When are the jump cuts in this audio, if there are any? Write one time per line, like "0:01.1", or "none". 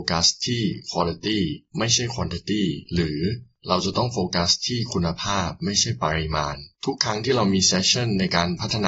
0:06.7

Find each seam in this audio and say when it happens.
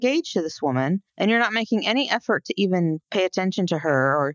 0:01.1
0:03.0

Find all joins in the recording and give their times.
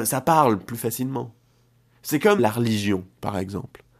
0:02.4

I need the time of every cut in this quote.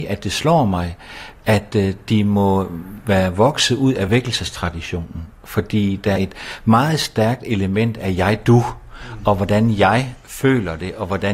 0:06.2
0:10.2

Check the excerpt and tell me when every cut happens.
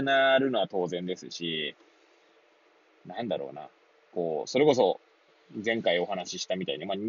none

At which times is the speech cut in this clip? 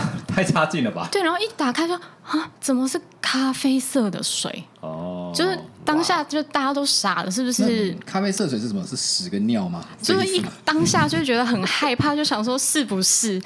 0:02.5

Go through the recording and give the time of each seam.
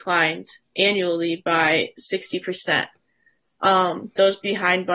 none

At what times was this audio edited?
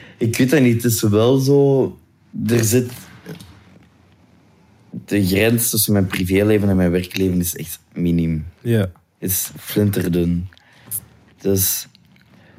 none

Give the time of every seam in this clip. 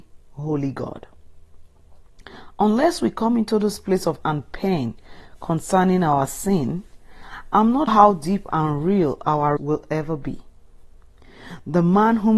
0:04.2
0:07.9
0:09.6

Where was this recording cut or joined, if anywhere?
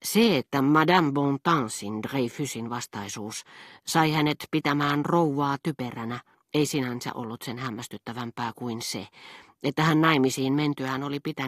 0:06.3

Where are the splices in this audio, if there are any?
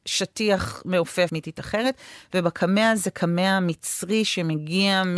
0:01.3

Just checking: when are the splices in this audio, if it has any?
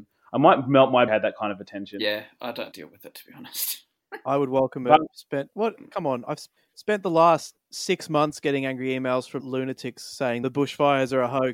0:01.1
0:02.7
0:06.6
0:07.6
0:09.4
0:10.4

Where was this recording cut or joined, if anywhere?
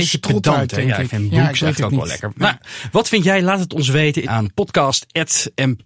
0:04.2

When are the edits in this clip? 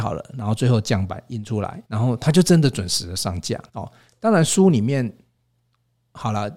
0:01.8
0:03.7

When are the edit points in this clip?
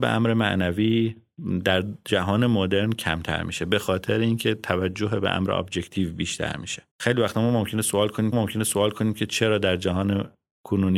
0:06.9
0:08.3

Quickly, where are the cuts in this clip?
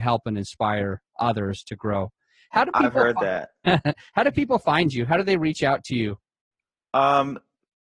none

